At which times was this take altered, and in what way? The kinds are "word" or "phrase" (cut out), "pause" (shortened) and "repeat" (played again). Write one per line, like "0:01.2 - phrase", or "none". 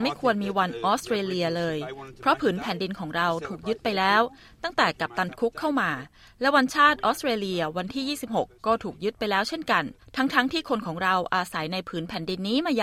none

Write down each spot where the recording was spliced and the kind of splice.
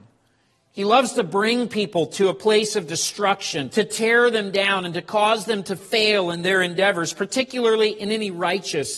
0:03.7 - word

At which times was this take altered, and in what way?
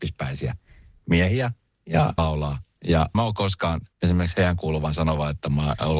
0:02.2 - phrase
0:03.1 - word
0:03.9 - pause

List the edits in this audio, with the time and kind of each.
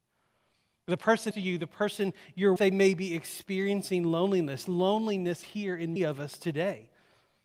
0:01.3 - word
0:02.6 - word
0:05.4 - word
0:06.0 - word

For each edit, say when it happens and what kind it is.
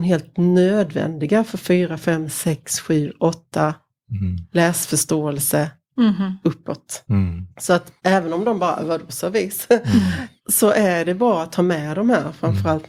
0:07.5 - pause
0:08.0 - pause
0:10.4 - pause

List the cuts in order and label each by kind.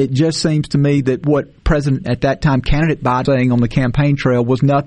0:02.0 - word
0:03.2 - word

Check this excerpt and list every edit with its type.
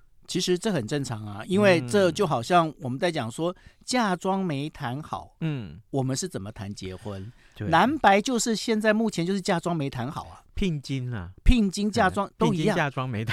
none

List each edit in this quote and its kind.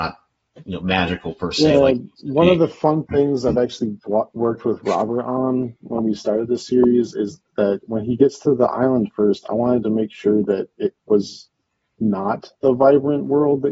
none

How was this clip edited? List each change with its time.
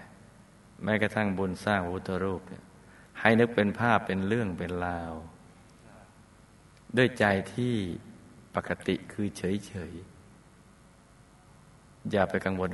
none

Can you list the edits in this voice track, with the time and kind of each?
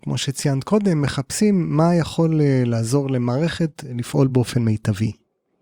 none

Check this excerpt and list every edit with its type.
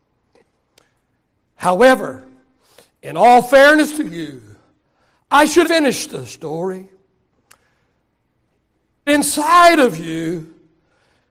0:05.6 - word
0:09.1 - word

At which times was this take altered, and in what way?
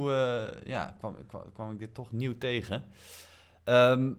none

